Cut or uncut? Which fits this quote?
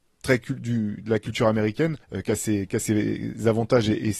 cut